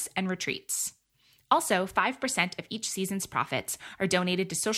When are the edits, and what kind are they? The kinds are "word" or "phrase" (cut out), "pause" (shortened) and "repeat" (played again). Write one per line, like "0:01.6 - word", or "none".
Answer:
none